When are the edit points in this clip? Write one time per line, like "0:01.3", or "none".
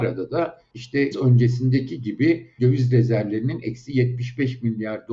0:01.1
0:02.6